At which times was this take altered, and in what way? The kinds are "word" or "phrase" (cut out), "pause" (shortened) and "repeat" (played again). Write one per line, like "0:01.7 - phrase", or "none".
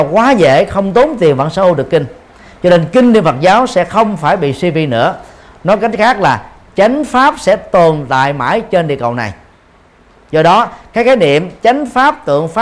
none